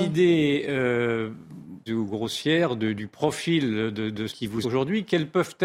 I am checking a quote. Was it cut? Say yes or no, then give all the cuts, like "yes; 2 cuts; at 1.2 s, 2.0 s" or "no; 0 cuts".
yes; 3 cuts; at 1.9 s, 4.3 s, 4.6 s